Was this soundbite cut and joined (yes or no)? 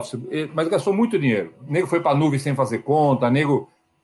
no